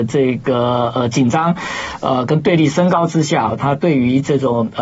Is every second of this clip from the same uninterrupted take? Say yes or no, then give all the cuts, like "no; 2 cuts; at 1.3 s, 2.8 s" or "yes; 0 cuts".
no; 1 cut; at 3.5 s